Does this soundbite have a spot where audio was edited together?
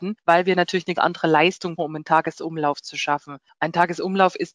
yes; 2 cuts; at 0.9 s, 1.8 s

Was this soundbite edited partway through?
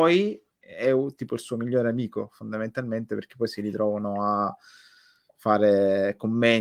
no; 0 cuts

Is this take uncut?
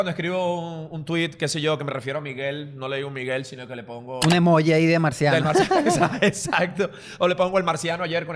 yes; 0 cuts

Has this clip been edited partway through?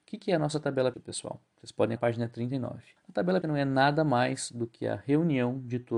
yes; 4 cuts; at 0.9 s, 2.0 s, 3.0 s, 3.4 s

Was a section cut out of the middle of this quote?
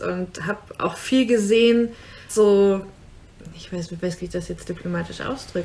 yes; 2 cuts; at 2.3 s, 4.2 s

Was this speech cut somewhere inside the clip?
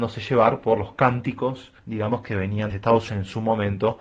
yes; 3 cuts; at 1.8 s, 2.7 s, 3.1 s

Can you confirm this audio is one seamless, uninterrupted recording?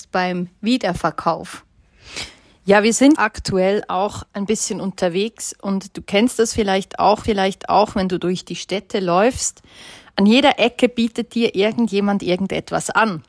no; 2 cuts; at 3.2 s, 7.2 s

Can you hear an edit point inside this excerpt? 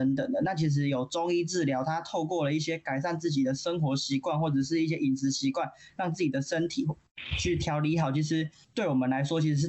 no; 0 cuts

